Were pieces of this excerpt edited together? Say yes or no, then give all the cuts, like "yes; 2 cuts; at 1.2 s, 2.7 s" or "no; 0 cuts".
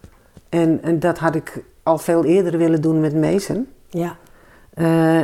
no; 0 cuts